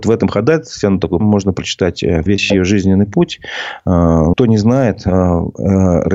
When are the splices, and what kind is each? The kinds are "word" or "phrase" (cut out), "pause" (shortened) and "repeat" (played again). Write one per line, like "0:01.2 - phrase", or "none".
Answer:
0:01.2 - word
0:02.3 - word
0:04.3 - word